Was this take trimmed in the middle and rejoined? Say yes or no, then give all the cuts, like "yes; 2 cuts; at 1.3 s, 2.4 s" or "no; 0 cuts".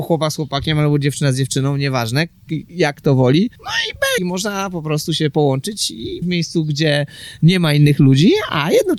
yes; 3 cuts; at 3.6 s, 4.2 s, 6.2 s